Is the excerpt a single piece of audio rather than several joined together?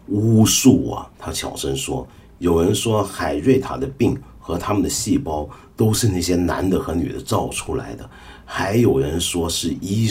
no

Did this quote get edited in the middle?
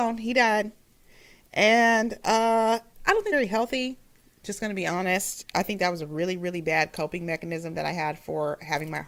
yes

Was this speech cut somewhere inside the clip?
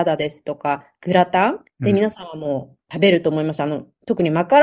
yes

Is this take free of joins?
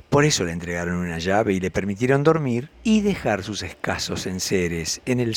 no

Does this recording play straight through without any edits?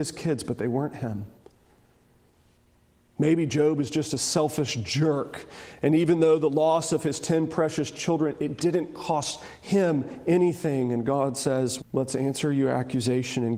no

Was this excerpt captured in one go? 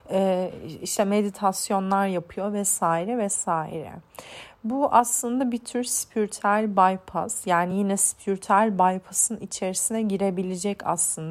yes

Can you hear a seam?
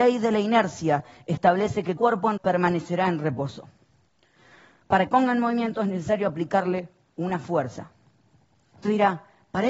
yes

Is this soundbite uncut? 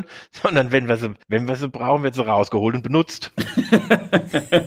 no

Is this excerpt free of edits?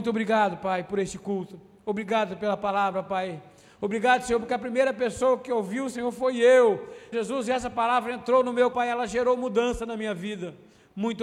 no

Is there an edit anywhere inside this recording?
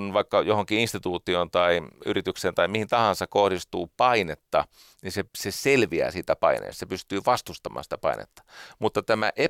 yes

